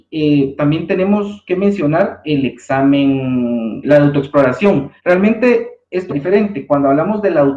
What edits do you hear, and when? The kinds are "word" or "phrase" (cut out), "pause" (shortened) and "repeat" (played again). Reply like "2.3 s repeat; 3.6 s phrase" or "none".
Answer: 3.8 s word; 5.0 s pause; 6.1 s word